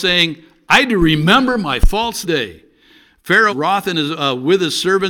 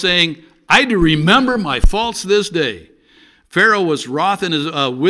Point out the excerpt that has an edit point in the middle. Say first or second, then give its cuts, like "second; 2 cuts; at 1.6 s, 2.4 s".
first; 2 cuts; at 2.2 s, 3.5 s